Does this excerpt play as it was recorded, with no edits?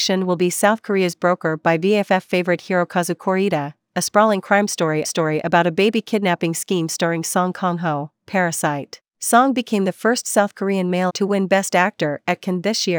no; 3 cuts; at 5.0 s, 9.1 s, 11.1 s

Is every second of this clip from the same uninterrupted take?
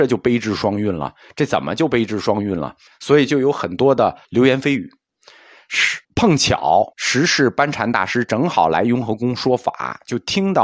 no; 4 cuts; at 2.9 s, 4.2 s, 6.0 s, 6.9 s

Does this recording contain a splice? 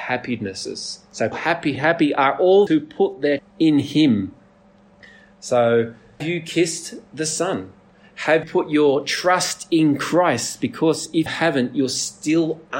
yes; 7 cuts; at 1.3 s, 1.8 s, 2.7 s, 3.4 s, 6.2 s, 8.4 s, 11.3 s

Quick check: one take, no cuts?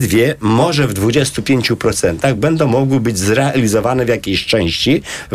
yes; 0 cuts

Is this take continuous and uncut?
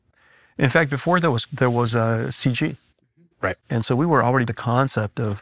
no; 3 cuts; at 1.5 s, 3.6 s, 4.5 s

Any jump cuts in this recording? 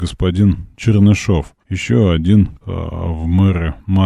yes; 2 cuts; at 1.6 s, 2.6 s

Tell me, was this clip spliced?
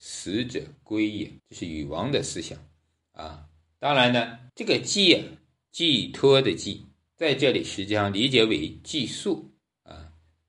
yes; 2 cuts; at 1.4 s, 4.5 s

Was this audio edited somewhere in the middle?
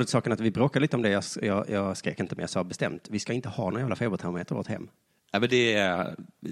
no; 0 cuts

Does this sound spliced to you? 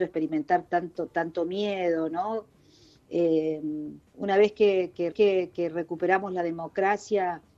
yes; 2 cuts; at 4.1 s, 5.1 s

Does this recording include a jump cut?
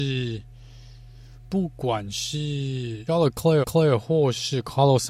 yes; 2 cuts; at 3.1 s, 3.6 s

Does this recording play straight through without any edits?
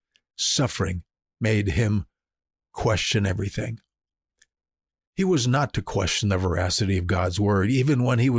yes; 0 cuts

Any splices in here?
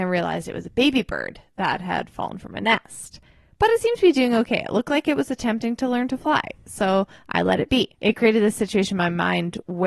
yes; 1 cut; at 7.9 s

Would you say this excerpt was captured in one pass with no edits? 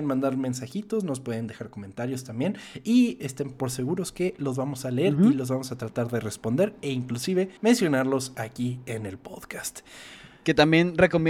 no; 1 cut; at 7.6 s

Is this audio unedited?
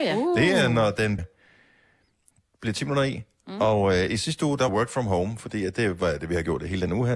no; 2 cuts; at 1.2 s, 4.7 s

